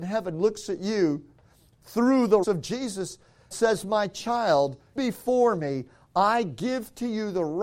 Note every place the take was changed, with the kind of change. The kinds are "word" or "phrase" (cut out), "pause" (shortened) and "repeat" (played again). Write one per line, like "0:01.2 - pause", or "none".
0:02.4 - word
0:03.5 - word
0:05.0 - word